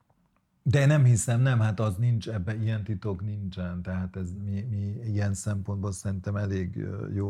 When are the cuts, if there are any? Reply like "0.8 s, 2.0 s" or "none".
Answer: none